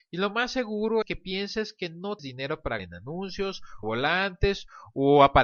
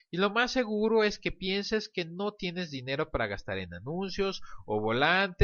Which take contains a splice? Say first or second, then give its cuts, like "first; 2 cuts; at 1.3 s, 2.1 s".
first; 4 cuts; at 1.0 s, 2.2 s, 2.8 s, 3.8 s